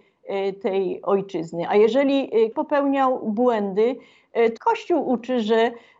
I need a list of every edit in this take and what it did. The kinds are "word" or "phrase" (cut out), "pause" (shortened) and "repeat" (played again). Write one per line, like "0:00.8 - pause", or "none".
0:02.5 - word
0:04.6 - word